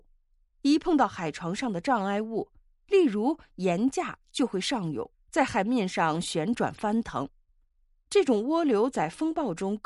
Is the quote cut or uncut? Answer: cut